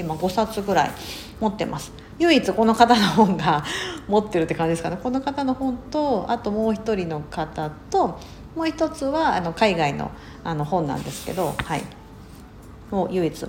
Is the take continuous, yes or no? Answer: yes